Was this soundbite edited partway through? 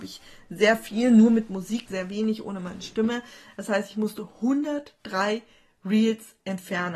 yes; 1 cut; at 1.9 s

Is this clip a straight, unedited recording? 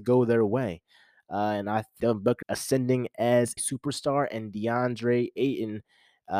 no; 3 cuts; at 2.0 s, 2.4 s, 3.6 s

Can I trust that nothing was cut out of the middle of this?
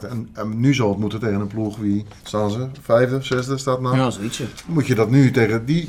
no; 1 cut; at 2.2 s

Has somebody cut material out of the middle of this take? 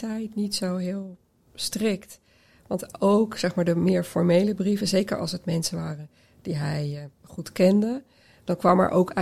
no; 0 cuts

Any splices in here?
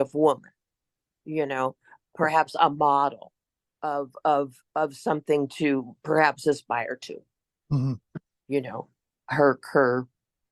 no; 0 cuts

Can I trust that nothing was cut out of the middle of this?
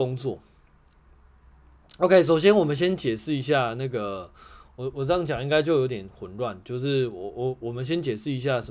yes; 0 cuts

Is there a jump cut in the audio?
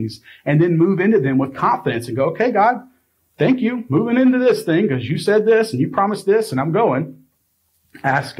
no; 0 cuts

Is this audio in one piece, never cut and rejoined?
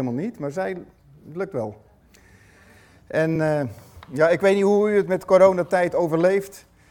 yes; 0 cuts

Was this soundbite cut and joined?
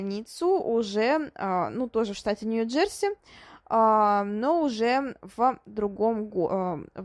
no; 0 cuts

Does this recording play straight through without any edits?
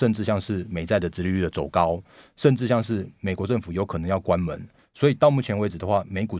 yes; 0 cuts

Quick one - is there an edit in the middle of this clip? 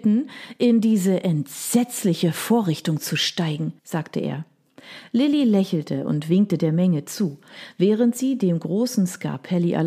yes; 1 cut; at 3.8 s

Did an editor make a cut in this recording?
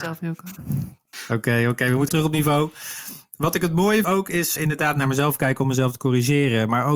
yes; 3 cuts; at 2.1 s, 4.0 s, 4.6 s

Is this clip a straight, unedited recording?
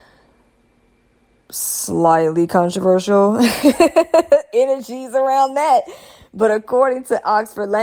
yes; 0 cuts

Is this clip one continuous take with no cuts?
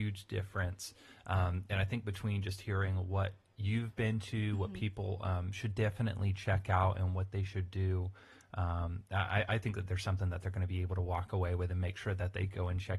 yes; 0 cuts

